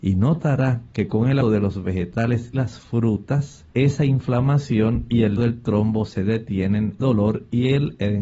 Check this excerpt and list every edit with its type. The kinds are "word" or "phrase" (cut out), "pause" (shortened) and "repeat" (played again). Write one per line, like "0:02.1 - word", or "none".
0:01.4 - word
0:02.5 - word
0:03.7 - pause
0:05.4 - word
0:07.0 - word